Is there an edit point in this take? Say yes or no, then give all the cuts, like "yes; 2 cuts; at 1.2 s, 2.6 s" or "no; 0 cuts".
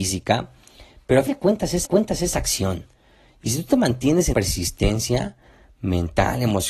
yes; 3 cuts; at 1.3 s, 1.8 s, 4.3 s